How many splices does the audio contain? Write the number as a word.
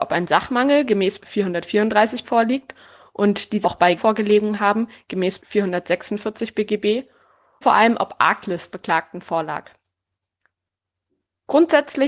seven